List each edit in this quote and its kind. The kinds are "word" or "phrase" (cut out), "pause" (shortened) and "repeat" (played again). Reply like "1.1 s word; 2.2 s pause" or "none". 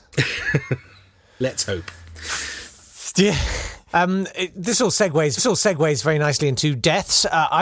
3.8 s pause; 5.4 s repeat